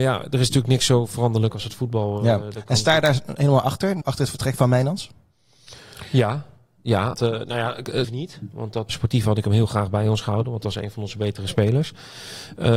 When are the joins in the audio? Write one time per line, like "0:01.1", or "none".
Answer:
0:04.0
0:07.1
0:08.0
0:08.9